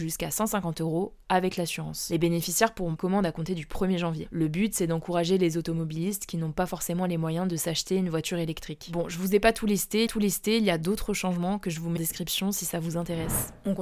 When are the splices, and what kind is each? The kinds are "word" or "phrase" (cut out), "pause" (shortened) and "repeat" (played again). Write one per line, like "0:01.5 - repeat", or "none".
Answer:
0:03.0 - word
0:10.1 - repeat
0:12.0 - word